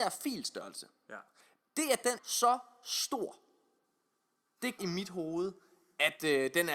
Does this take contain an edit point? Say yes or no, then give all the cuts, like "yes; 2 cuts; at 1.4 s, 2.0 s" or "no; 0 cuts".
yes; 2 cuts; at 2.2 s, 4.8 s